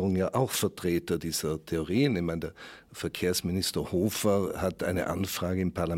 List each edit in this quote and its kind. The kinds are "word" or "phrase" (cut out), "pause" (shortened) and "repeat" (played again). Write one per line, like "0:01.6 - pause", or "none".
none